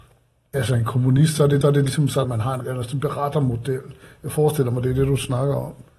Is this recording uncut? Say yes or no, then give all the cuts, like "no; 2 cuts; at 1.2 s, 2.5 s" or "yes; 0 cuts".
no; 3 cuts; at 1.6 s, 2.2 s, 2.6 s